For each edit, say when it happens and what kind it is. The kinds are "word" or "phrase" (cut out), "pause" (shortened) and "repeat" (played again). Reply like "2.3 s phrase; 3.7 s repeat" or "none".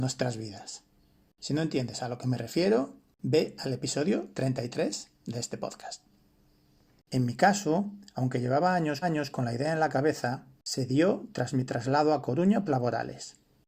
9.0 s repeat; 12.7 s phrase